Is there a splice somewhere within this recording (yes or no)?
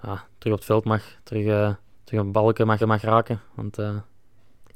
yes